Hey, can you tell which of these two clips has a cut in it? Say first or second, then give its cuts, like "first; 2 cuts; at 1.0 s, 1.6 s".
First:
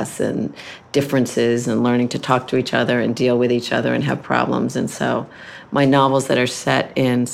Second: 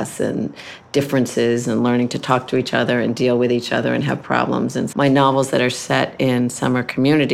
second; 1 cut; at 4.9 s